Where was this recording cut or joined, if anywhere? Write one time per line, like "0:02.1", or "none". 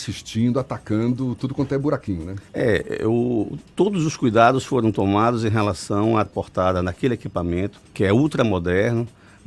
0:02.5
0:06.2
0:07.8